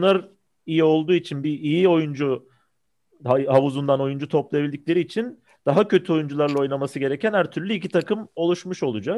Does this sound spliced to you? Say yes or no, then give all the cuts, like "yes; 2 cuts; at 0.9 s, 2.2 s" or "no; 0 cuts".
no; 0 cuts